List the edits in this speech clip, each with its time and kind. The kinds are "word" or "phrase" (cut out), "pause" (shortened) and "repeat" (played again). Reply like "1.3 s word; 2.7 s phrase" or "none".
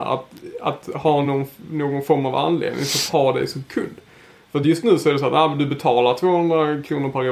none